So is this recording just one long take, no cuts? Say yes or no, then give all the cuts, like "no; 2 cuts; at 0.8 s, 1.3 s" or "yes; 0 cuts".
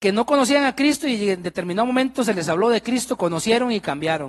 yes; 0 cuts